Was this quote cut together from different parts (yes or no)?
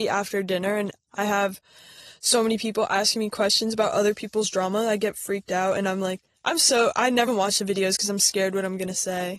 yes